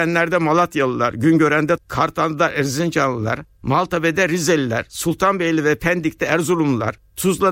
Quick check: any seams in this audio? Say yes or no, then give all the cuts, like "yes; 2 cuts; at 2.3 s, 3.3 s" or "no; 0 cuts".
yes; 1 cut; at 1.8 s